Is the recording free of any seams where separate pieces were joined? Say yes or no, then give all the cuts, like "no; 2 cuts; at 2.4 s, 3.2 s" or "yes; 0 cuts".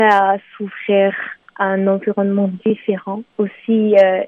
yes; 0 cuts